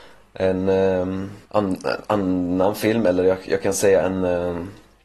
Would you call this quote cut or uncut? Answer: cut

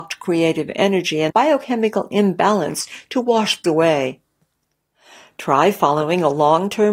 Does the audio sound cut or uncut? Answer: cut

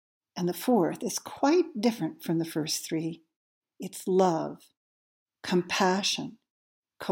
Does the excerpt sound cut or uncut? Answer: uncut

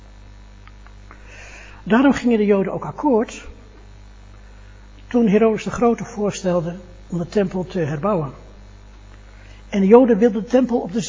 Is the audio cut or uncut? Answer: uncut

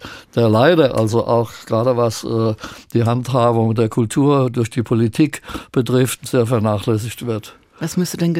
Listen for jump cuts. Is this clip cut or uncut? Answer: uncut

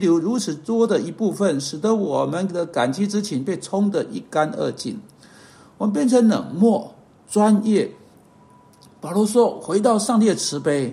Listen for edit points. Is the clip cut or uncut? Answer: uncut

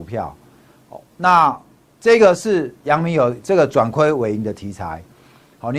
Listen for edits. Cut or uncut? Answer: cut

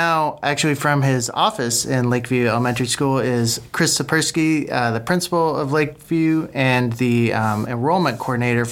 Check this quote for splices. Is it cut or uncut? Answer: uncut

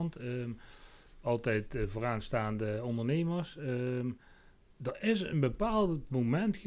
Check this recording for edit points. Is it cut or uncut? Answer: uncut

